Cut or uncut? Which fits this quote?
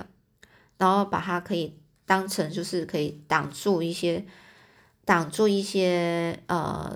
uncut